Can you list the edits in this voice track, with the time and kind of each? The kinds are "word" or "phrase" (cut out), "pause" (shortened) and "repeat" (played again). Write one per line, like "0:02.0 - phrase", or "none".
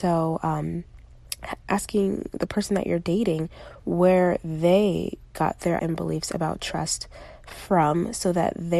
0:01.7 - word
0:05.8 - word